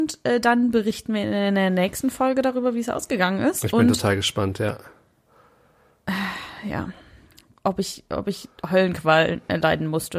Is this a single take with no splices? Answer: yes; 0 cuts

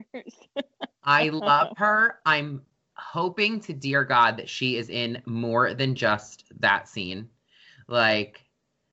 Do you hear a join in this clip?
no; 0 cuts

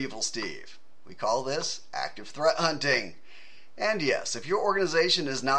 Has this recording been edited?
no; 0 cuts

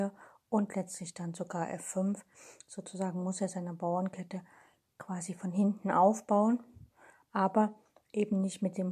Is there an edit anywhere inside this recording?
no; 0 cuts

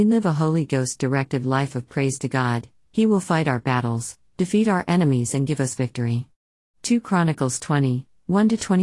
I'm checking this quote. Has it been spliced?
no; 0 cuts

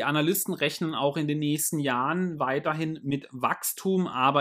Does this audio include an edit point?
no; 0 cuts

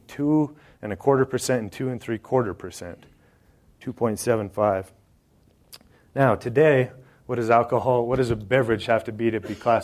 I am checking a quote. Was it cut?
no; 0 cuts

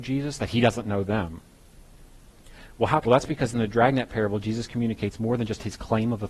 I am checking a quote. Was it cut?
yes; 1 cut; at 3.1 s

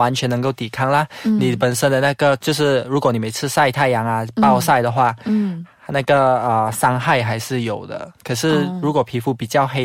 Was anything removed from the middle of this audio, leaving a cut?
no; 0 cuts

